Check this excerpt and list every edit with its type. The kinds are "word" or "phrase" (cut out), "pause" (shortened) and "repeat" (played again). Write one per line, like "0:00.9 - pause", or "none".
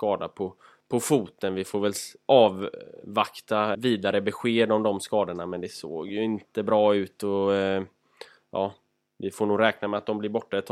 0:03.7 - word